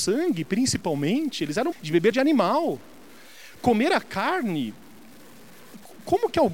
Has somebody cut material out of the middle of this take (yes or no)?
yes